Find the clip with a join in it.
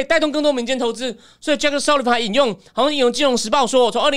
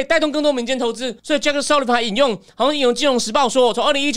second; 1 cut; at 1.2 s

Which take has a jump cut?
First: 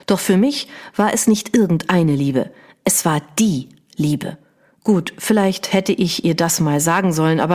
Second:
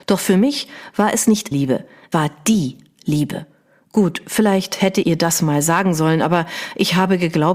second; 3 cuts; at 1.5 s, 2.1 s, 5.0 s

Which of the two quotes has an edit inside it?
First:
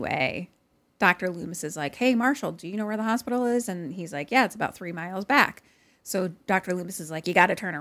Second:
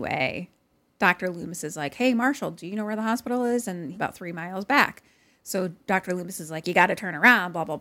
second; 1 cut; at 3.9 s

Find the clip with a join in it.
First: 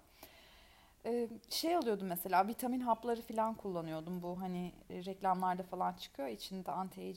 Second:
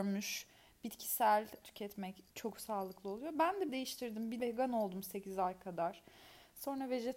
second; 4 cuts; at 1.6 s, 2.3 s, 3.7 s, 4.4 s

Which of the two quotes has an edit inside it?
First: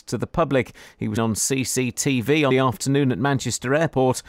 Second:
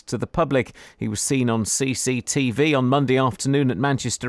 first; 2 cuts; at 1.2 s, 2.5 s

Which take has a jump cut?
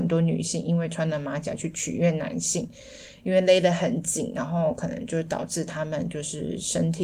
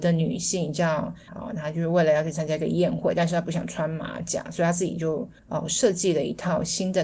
second; 2 cuts; at 1.3 s, 5.4 s

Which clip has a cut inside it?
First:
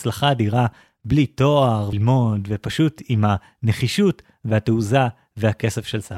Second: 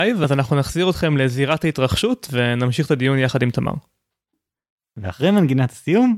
first; 1 cut; at 1.9 s

